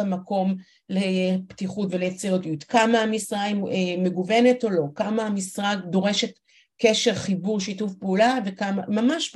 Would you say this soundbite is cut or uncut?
uncut